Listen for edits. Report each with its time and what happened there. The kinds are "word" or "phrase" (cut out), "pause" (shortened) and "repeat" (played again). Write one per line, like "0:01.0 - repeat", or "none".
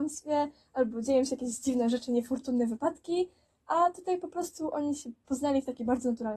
none